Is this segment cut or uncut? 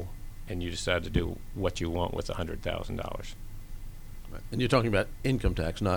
uncut